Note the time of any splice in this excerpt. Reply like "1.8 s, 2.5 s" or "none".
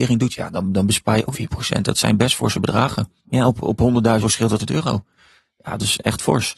1.3 s, 3.2 s, 4.2 s, 4.6 s

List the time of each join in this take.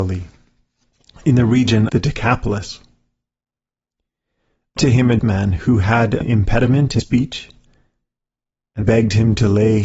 1.9 s, 4.8 s, 5.2 s, 6.2 s, 7.0 s, 8.8 s

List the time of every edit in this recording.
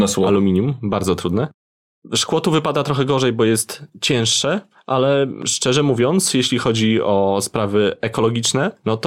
none

